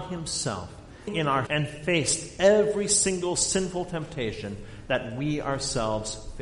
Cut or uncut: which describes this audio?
cut